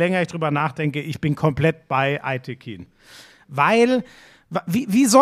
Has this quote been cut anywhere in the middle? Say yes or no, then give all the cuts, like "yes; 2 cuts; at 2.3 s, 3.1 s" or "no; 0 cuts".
no; 0 cuts